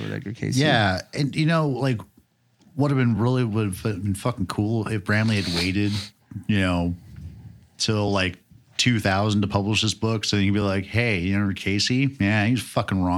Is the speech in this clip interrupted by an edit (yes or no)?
no